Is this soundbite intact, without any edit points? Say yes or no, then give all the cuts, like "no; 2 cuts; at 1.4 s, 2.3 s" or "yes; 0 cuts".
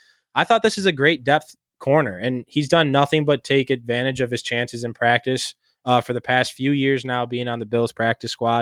yes; 0 cuts